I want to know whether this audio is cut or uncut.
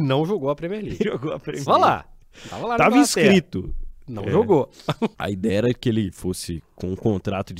cut